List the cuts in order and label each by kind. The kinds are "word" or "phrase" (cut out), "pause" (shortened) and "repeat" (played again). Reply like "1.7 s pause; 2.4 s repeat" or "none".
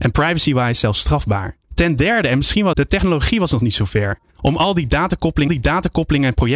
1.6 s pause; 2.7 s phrase; 4.3 s pause; 5.5 s repeat

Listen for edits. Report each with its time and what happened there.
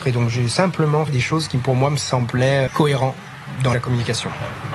1.1 s word; 2.7 s word; 3.7 s phrase

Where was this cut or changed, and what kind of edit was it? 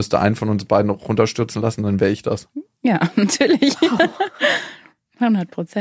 none

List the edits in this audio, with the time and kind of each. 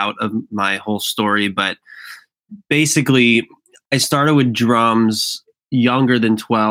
none

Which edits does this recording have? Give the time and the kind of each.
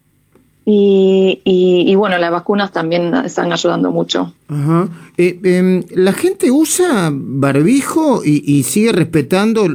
4.4 s pause

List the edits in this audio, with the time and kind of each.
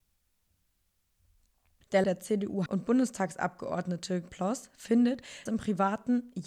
2.0 s word; 2.7 s word; 4.3 s word; 5.5 s word

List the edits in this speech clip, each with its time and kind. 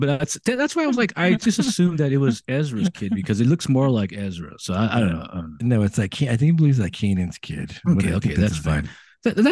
none

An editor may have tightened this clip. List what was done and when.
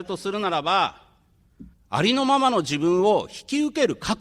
1.7 s pause

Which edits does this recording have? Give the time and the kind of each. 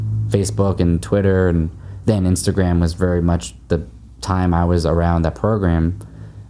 none

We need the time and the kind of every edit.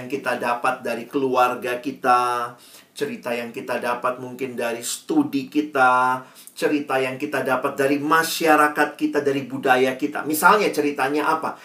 none

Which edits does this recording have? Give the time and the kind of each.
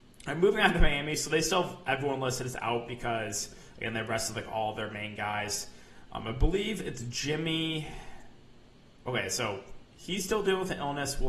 9.9 s pause

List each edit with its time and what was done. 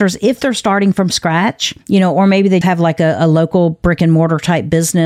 1.8 s pause; 2.6 s word

